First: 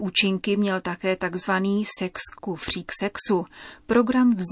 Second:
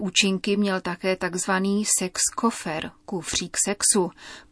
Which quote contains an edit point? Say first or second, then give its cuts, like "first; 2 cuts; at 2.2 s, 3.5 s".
first; 1 cut; at 2.3 s